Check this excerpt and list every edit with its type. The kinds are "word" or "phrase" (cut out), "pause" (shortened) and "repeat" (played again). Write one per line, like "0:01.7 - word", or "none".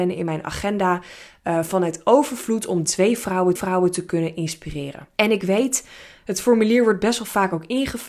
0:02.9 - word
0:03.6 - repeat
0:05.1 - pause